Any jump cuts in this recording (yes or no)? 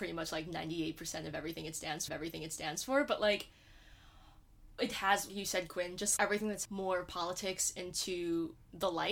yes